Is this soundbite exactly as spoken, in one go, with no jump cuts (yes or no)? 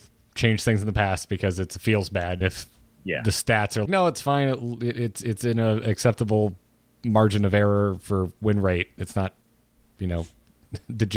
no